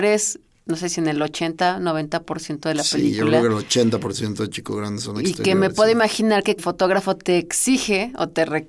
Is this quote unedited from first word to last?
no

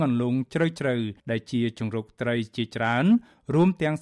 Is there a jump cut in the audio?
yes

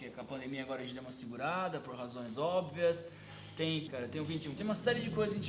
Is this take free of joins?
no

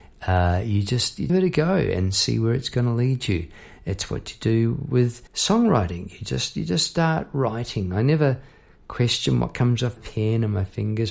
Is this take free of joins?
no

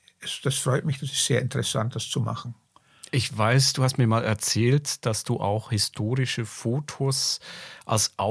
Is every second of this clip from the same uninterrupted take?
yes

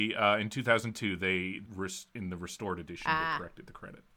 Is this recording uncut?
no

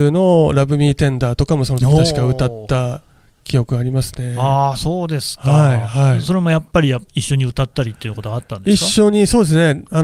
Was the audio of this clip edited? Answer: no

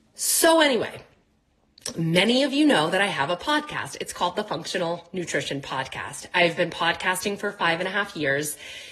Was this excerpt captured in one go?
yes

